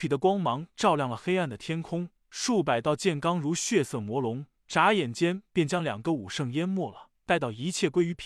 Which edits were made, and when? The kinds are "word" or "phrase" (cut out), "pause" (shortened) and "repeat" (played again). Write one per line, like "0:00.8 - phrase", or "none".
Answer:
none